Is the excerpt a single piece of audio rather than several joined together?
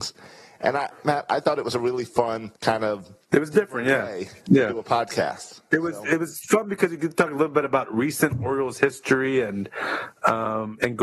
no; 2 cuts; at 2.6 s, 3.2 s

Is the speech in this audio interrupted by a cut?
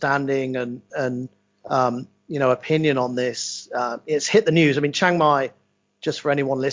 no; 0 cuts

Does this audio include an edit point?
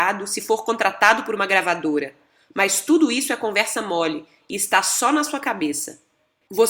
no; 0 cuts

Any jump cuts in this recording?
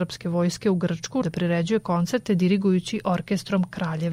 yes; 1 cut; at 1.2 s

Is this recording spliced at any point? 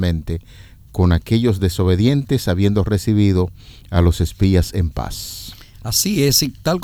no; 0 cuts

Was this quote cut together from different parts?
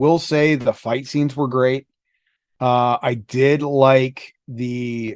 no; 0 cuts

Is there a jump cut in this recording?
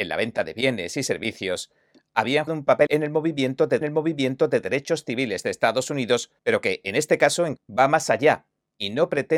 yes; 5 cuts; at 2.5 s, 2.9 s, 3.8 s, 6.4 s, 7.6 s

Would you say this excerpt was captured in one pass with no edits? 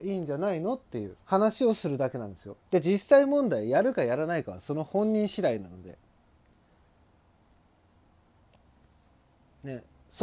no; 2 cuts; at 1.2 s, 2.6 s

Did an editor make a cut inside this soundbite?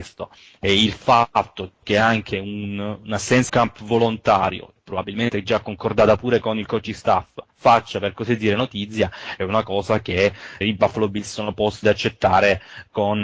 yes; 4 cuts; at 3.5 s, 7.5 s, 10.6 s, 11.8 s

